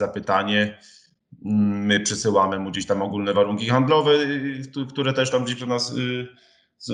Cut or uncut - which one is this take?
uncut